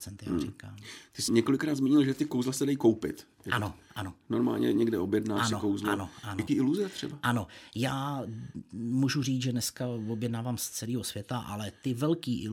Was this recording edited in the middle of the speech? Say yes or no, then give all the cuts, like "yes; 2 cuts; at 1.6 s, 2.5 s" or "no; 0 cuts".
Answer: yes; 2 cuts; at 1.3 s, 6.5 s